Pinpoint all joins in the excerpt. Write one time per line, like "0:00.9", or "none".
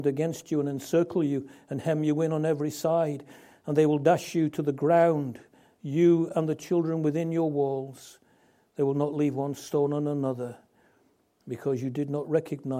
none